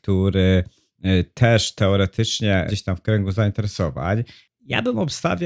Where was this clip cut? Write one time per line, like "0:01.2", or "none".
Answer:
0:02.7